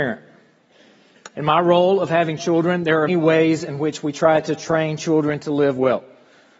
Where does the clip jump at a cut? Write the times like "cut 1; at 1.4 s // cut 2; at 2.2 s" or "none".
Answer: cut 1; at 3.1 s